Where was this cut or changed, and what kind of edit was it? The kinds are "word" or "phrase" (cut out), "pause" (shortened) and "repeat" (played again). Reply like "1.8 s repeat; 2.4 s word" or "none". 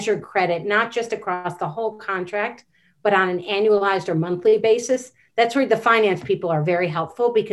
none